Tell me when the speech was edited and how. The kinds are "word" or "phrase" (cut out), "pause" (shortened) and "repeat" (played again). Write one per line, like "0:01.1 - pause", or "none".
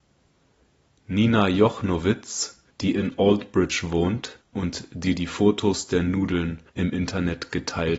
0:02.7 - pause
0:04.4 - pause
0:06.7 - pause